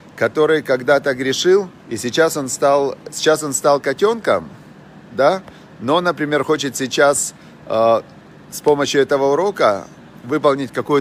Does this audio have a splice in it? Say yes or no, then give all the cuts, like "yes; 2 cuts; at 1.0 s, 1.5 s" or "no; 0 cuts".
yes; 1 cut; at 1.8 s